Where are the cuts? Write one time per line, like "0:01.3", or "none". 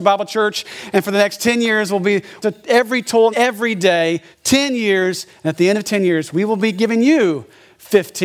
0:02.4
0:03.3
0:04.3

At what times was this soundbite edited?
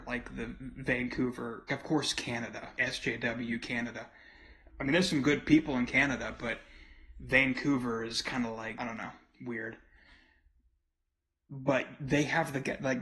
0:01.7
0:02.8
0:04.7
0:08.8

